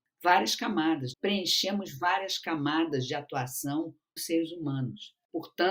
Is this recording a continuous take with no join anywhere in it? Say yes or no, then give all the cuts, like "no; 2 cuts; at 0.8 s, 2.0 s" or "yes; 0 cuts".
no; 2 cuts; at 1.1 s, 4.2 s